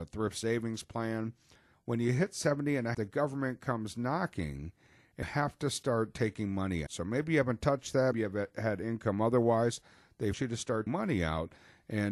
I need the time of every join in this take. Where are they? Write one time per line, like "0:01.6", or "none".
0:02.9
0:05.2
0:06.9
0:08.1
0:10.3
0:10.9